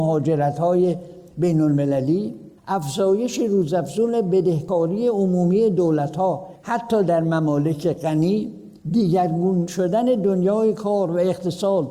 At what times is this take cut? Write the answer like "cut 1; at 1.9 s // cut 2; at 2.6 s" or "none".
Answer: cut 1; at 2.6 s // cut 2; at 8.8 s